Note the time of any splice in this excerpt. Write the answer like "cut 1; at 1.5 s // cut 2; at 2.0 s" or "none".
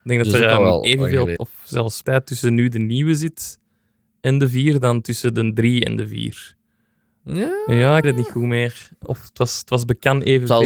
cut 1; at 1.4 s // cut 2; at 2.0 s // cut 3; at 8.0 s